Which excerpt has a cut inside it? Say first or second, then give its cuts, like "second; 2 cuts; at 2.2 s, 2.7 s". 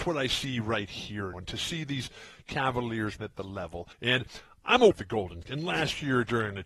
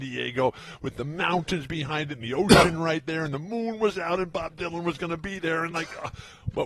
first; 5 cuts; at 1.3 s, 3.2 s, 3.9 s, 4.9 s, 5.4 s